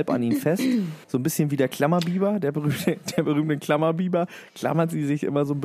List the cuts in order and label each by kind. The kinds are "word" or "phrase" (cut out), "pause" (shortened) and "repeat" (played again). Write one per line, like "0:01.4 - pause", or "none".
0:01.0 - pause